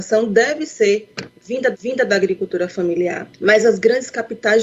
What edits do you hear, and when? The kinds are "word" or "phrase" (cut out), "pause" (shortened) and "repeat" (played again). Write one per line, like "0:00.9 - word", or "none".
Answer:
0:01.7 - repeat
0:03.3 - pause

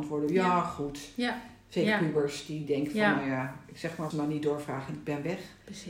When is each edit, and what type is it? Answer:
0:02.6 - word
0:04.1 - phrase

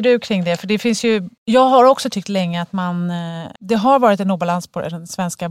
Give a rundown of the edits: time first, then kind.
0:01.4 - pause
0:03.6 - pause

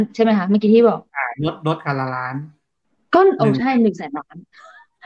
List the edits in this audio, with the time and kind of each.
0:02.8 - pause

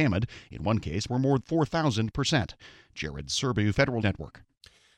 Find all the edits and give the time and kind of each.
0:01.1 - word
0:01.4 - word
0:04.0 - word

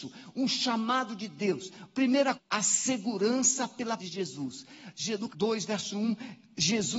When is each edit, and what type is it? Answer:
0:02.3 - word
0:04.0 - word
0:05.3 - word

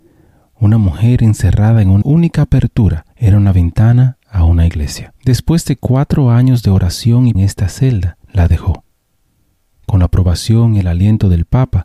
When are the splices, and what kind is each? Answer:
0:02.0 - phrase
0:03.1 - pause
0:05.2 - pause
0:07.3 - phrase
0:08.2 - pause

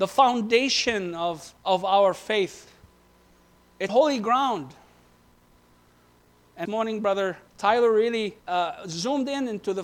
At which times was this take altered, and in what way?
0:01.6 - pause
0:03.9 - word
0:06.6 - phrase
0:07.5 - pause
0:08.4 - pause

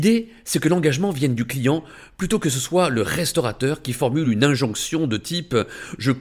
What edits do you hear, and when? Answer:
none

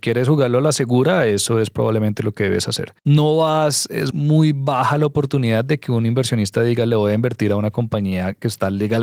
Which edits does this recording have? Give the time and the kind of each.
0:03.0 - pause
0:04.1 - word

